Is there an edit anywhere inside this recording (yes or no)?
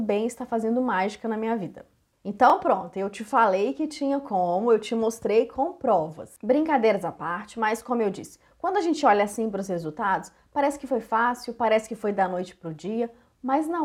no